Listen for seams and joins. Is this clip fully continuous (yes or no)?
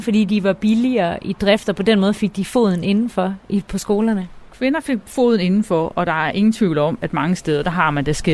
no